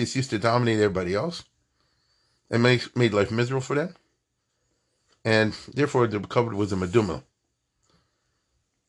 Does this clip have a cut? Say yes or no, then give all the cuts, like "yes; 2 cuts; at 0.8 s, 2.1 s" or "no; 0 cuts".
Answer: no; 0 cuts